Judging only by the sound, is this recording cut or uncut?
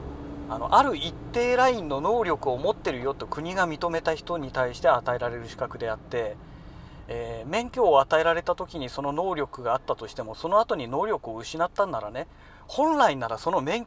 uncut